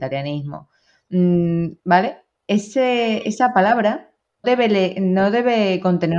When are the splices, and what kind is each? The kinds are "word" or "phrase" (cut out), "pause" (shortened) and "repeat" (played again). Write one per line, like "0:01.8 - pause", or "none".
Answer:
0:01.8 - pause
0:04.4 - word

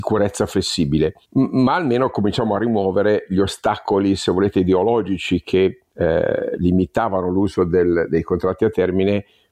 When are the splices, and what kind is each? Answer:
0:01.2 - pause
0:05.9 - pause

